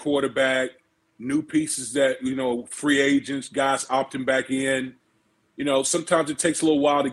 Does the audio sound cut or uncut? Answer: uncut